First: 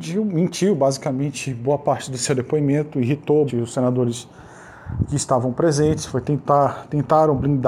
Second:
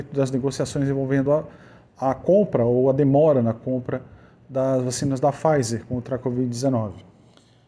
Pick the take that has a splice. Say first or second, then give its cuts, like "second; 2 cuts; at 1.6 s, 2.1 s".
first; 1 cut; at 3.5 s